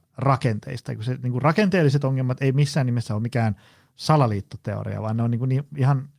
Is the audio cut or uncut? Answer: uncut